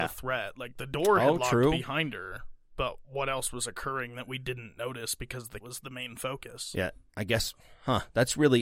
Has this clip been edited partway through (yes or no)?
yes